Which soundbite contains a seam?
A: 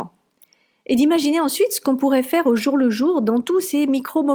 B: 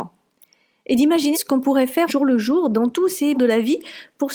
B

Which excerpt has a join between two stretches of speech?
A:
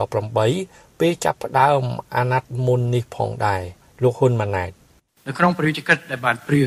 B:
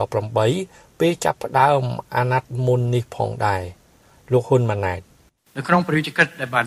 A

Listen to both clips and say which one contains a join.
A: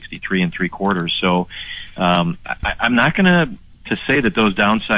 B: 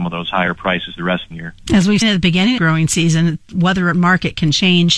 B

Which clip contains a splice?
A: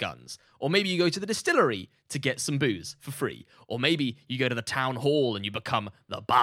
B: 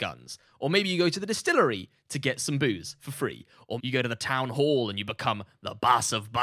B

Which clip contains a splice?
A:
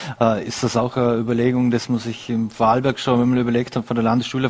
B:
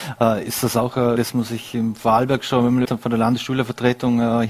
B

